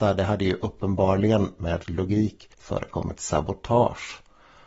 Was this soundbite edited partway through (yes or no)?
yes